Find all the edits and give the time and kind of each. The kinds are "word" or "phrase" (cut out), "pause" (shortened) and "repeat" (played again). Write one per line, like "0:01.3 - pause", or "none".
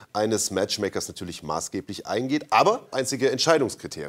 0:02.9 - phrase